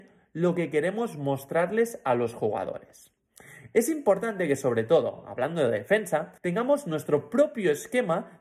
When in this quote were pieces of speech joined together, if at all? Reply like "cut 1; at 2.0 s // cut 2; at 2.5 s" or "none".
cut 1; at 6.4 s